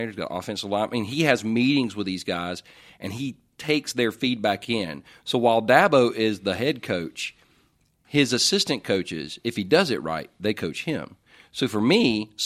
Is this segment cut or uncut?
uncut